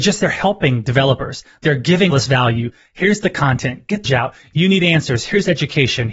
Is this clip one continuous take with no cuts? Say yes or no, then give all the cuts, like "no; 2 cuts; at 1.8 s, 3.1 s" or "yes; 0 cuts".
no; 2 cuts; at 2.1 s, 4.1 s